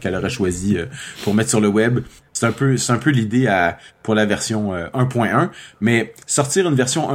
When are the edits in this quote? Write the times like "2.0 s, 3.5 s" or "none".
none